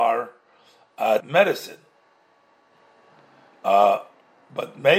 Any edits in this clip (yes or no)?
yes